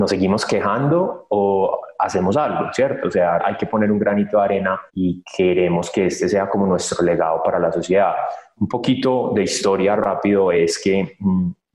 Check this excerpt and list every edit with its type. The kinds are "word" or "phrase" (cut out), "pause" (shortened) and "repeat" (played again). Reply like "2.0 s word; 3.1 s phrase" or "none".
3.4 s word; 4.9 s pause; 10.0 s word